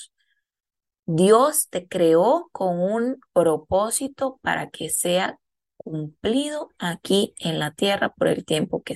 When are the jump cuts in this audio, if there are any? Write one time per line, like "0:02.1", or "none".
0:03.3